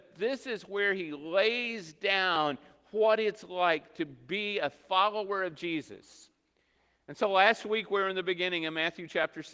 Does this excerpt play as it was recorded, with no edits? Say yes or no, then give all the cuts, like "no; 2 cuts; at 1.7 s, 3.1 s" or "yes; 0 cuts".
yes; 0 cuts